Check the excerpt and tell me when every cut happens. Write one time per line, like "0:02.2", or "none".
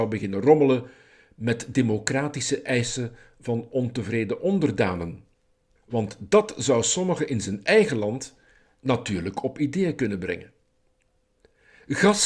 none